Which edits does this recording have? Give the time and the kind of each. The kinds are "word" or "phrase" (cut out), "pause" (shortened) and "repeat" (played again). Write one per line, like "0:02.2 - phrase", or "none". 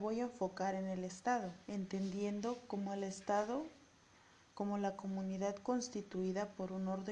0:01.6 - pause